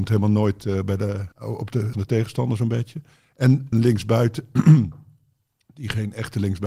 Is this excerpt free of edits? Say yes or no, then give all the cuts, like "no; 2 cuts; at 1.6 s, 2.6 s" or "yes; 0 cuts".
no; 3 cuts; at 1.3 s, 1.9 s, 3.7 s